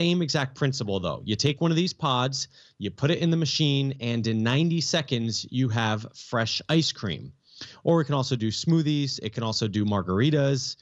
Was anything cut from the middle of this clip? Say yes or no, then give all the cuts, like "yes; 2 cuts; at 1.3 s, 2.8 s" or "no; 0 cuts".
no; 0 cuts